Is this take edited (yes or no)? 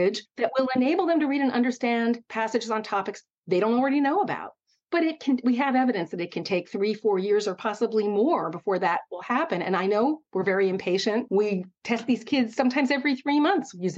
no